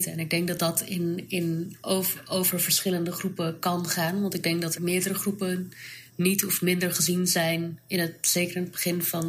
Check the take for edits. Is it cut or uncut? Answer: cut